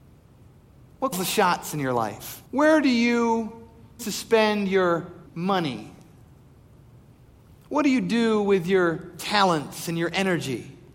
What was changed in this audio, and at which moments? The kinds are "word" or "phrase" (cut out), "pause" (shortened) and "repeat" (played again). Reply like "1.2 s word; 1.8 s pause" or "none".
1.1 s word; 2.5 s pause; 4.0 s word; 5.3 s pause